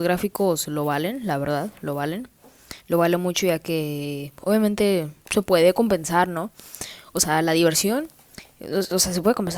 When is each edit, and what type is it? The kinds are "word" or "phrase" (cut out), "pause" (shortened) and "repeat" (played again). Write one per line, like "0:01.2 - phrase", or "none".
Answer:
0:02.8 - pause
0:05.2 - pause